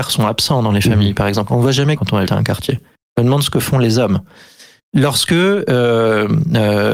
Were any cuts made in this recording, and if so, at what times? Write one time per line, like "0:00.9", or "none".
0:02.0
0:02.3